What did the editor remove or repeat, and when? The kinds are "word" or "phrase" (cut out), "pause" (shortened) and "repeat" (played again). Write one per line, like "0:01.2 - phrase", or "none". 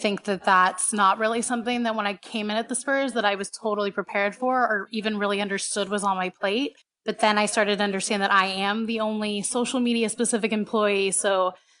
0:06.8 - pause